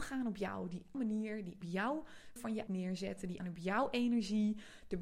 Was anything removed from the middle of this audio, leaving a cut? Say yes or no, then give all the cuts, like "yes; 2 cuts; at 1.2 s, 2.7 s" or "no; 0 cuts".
yes; 5 cuts; at 0.9 s, 1.6 s, 2.4 s, 2.7 s, 3.4 s